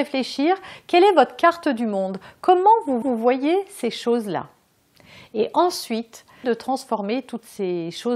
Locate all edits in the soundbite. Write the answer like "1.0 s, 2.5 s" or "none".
3.0 s, 6.4 s